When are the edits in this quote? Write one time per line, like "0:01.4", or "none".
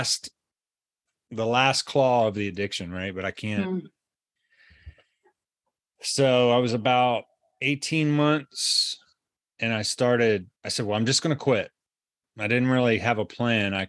0:10.6